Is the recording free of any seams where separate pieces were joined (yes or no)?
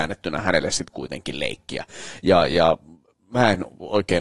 yes